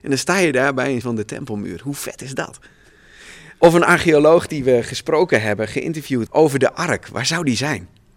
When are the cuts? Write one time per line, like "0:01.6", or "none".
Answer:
0:01.0
0:06.3